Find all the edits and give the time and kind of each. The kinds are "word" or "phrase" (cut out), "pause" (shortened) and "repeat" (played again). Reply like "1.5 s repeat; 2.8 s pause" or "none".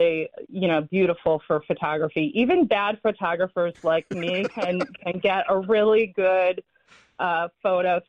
none

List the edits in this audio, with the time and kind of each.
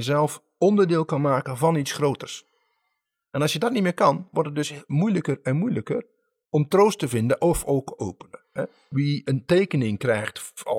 6.4 s word; 8.0 s phrase

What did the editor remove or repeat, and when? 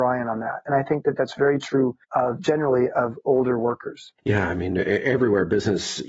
2.0 s pause; 4.2 s pause

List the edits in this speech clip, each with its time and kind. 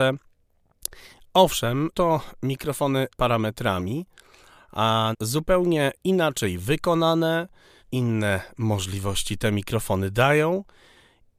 1.9 s word; 3.2 s word; 5.1 s word; 7.8 s word

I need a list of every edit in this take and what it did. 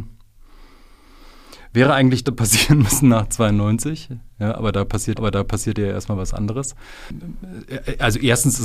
2.2 s phrase; 5.2 s repeat

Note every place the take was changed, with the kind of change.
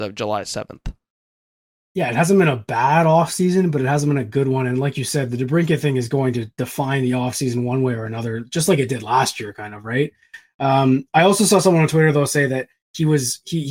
none

